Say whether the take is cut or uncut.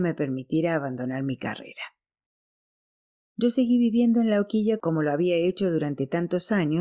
uncut